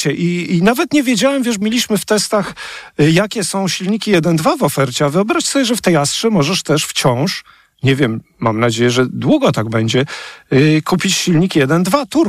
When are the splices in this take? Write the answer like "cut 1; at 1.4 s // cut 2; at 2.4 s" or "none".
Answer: cut 1; at 1.6 s